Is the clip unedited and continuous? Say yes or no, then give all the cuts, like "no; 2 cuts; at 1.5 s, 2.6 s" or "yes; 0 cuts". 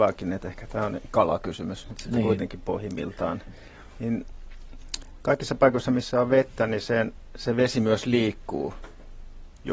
yes; 0 cuts